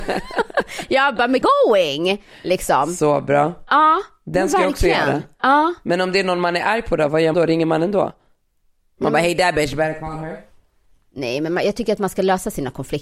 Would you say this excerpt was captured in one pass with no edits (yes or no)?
no